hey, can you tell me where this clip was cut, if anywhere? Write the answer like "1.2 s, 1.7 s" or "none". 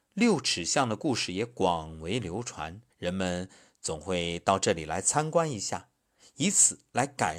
2.9 s